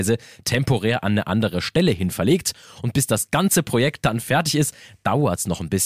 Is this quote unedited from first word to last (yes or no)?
yes